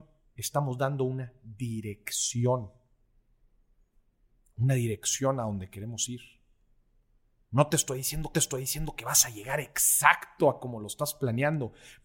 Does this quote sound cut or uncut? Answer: cut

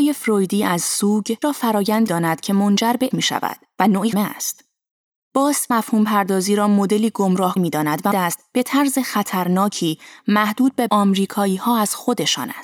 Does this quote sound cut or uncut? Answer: cut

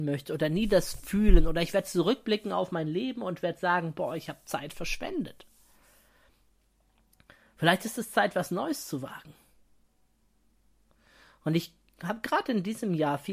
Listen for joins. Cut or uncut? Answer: uncut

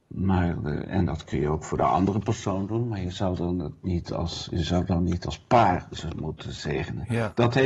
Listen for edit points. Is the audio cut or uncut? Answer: uncut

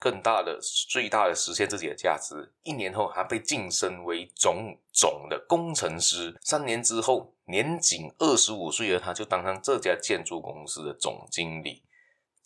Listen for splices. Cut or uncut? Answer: cut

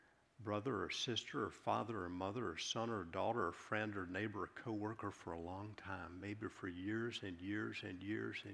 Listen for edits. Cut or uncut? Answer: uncut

